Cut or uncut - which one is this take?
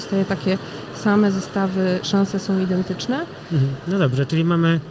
uncut